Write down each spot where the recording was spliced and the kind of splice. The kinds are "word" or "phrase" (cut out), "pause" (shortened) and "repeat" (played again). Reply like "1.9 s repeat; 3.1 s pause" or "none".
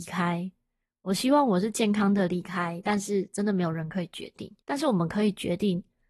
4.6 s pause